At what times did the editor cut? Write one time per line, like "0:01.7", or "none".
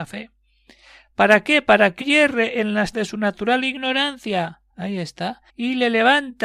0:02.0
0:02.9
0:04.7
0:05.5